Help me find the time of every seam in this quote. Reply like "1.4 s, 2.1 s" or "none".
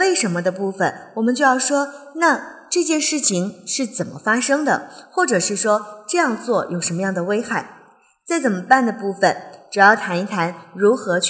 none